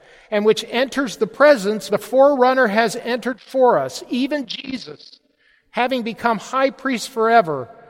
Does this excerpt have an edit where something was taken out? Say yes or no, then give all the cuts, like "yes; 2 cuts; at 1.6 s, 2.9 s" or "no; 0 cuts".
yes; 1 cut; at 1.9 s